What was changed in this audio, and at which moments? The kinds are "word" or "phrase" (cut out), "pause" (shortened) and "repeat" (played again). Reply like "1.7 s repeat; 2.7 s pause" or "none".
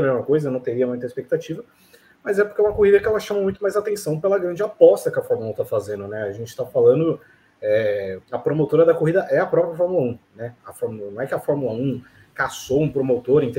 8.2 s pause